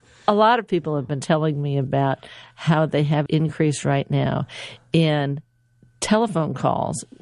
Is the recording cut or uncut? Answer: cut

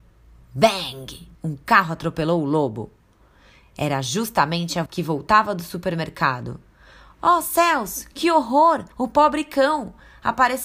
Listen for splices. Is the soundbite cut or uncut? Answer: cut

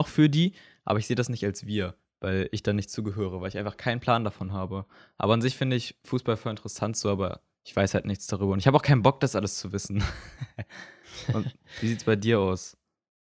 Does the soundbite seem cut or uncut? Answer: uncut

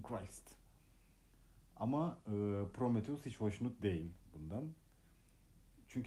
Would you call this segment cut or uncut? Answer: uncut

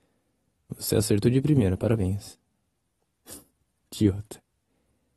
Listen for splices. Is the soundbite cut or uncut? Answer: uncut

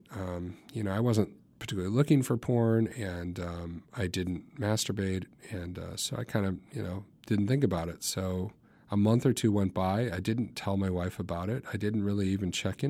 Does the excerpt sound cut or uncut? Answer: uncut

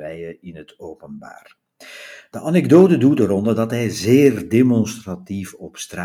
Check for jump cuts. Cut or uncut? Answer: uncut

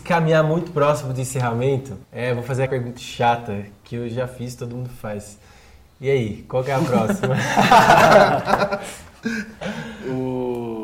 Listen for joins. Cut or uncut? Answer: cut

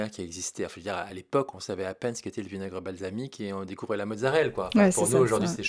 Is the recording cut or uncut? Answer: uncut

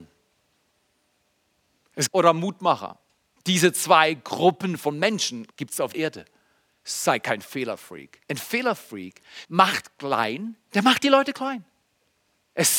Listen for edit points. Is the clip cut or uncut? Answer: cut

